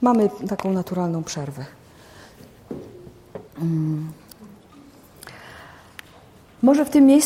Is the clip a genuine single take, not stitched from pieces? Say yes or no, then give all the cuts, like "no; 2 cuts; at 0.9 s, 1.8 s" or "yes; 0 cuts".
no; 1 cut; at 3.5 s